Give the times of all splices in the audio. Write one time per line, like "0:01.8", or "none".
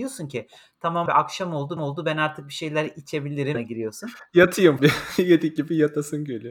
0:01.1
0:01.8
0:03.5
0:04.8